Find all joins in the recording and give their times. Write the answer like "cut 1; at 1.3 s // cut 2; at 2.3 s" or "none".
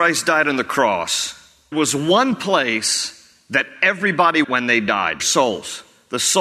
cut 1; at 1.7 s // cut 2; at 4.4 s // cut 3; at 5.2 s